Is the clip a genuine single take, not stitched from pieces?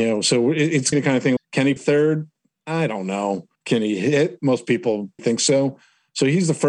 no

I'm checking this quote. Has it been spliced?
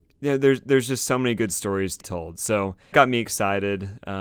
yes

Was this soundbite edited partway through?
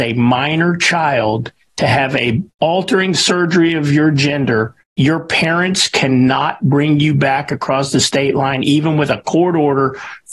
yes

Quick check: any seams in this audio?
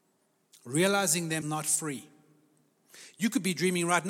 yes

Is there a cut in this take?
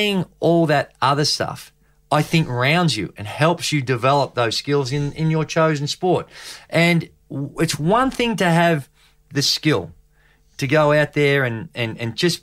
no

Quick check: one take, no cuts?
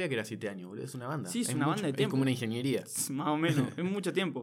yes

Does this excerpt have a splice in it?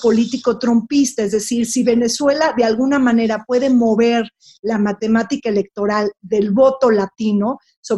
no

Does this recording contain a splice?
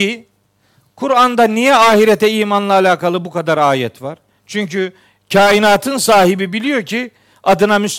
no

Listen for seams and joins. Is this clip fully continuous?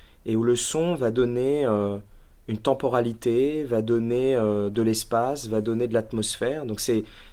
yes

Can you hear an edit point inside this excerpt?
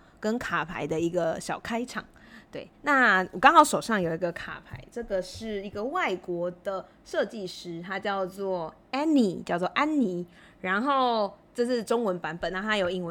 yes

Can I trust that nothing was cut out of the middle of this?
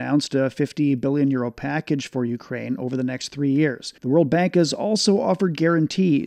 no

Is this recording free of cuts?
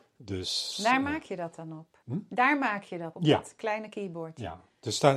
no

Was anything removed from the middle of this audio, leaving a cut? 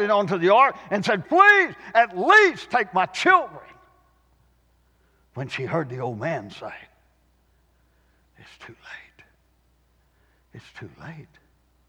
yes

